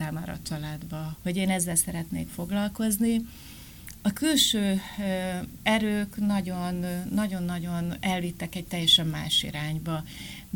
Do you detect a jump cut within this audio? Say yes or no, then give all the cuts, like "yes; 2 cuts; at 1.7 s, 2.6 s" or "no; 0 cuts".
yes; 1 cut; at 1.2 s